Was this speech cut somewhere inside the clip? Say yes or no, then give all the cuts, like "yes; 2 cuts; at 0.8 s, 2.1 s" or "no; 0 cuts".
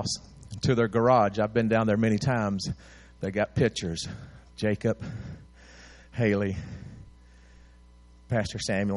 no; 0 cuts